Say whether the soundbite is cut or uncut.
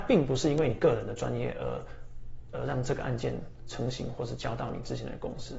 cut